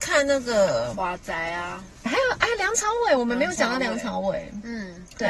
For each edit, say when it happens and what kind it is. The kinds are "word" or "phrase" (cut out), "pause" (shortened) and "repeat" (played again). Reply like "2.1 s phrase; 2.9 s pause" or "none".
2.1 s phrase